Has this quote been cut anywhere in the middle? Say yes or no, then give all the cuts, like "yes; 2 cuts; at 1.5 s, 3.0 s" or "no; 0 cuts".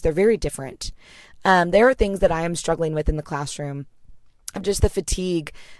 no; 0 cuts